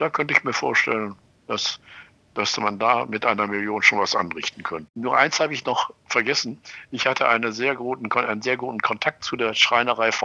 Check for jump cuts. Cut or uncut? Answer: uncut